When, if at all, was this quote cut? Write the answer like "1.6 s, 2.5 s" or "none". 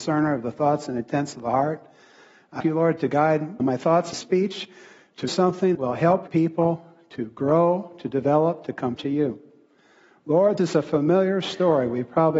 2.6 s, 3.6 s, 4.1 s, 5.3 s, 5.7 s, 6.3 s, 8.9 s, 10.6 s